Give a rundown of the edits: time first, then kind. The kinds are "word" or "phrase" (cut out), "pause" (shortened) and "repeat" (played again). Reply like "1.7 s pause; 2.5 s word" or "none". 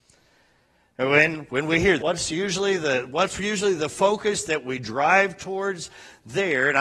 2.0 s phrase